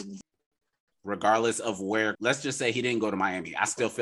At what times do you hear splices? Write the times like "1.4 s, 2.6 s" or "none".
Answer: 2.1 s